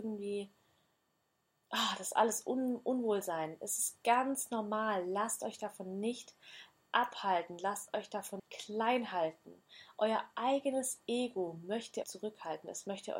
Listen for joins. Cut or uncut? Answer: cut